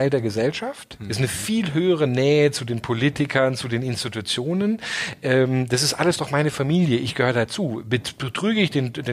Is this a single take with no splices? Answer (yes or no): yes